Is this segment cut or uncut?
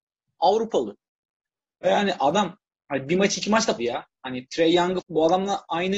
cut